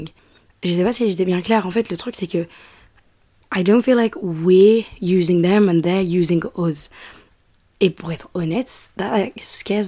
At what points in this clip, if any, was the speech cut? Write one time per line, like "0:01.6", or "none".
none